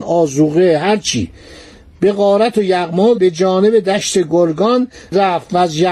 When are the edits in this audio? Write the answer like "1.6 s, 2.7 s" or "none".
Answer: 3.1 s